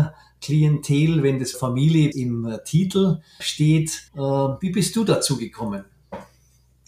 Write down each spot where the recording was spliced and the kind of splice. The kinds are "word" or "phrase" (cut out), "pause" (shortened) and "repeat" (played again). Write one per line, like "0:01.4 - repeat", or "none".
0:01.5 - word
0:02.1 - word
0:03.4 - word
0:04.1 - pause